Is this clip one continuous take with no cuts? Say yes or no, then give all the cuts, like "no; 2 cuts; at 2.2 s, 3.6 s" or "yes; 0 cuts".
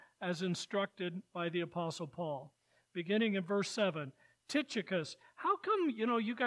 yes; 0 cuts